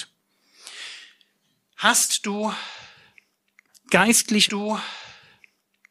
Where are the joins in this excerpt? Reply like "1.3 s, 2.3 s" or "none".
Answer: 4.5 s